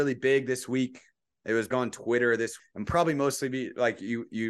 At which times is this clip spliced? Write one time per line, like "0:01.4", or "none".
0:01.7
0:02.6